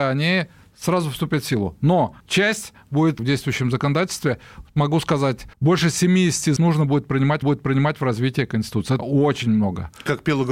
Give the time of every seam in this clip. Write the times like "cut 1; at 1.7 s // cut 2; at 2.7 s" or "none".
cut 1; at 2.2 s // cut 2; at 3.2 s // cut 3; at 5.5 s // cut 4; at 6.6 s // cut 5; at 7.4 s // cut 6; at 9.0 s